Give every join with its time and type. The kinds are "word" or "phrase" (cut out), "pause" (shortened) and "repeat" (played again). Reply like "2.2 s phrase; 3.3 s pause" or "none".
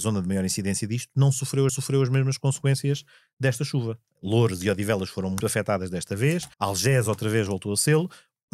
1.7 s repeat; 5.4 s word; 6.5 s pause